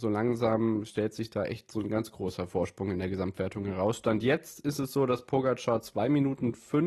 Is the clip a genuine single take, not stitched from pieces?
yes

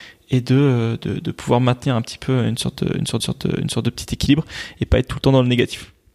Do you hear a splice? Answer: yes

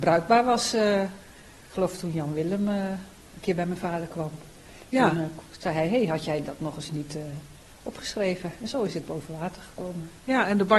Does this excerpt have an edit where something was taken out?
no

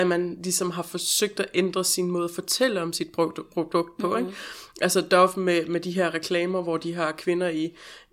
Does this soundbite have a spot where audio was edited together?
no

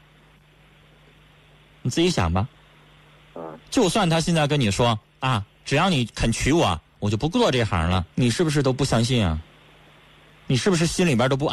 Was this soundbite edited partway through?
yes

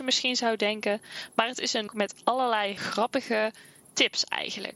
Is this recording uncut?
no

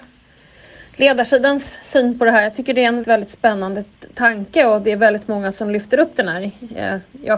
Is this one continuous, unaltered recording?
no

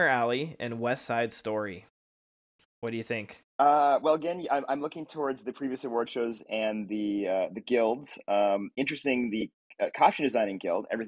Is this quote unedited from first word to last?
no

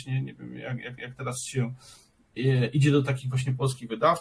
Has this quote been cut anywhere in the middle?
yes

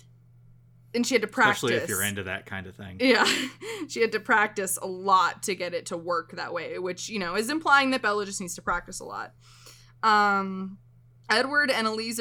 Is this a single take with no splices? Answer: yes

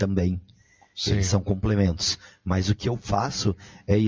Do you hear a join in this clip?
no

